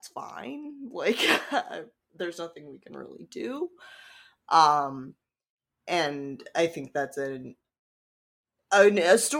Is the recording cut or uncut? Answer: uncut